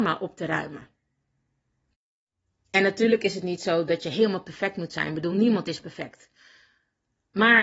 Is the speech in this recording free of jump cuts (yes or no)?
yes